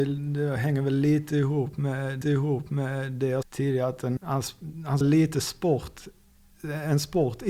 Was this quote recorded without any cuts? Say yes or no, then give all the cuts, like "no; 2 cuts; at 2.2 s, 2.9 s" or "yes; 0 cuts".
no; 4 cuts; at 2.2 s, 3.4 s, 4.2 s, 5.0 s